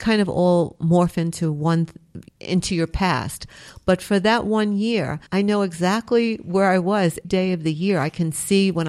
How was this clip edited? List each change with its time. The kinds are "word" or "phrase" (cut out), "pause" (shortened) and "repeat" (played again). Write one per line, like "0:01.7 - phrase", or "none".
0:02.3 - pause
0:05.3 - pause
0:07.2 - word